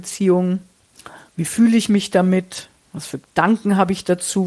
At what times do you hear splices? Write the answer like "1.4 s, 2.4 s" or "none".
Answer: none